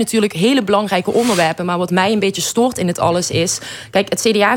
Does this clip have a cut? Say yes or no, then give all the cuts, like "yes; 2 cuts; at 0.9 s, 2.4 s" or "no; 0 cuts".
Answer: no; 0 cuts